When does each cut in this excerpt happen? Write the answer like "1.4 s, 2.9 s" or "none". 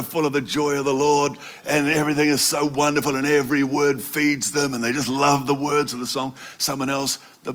none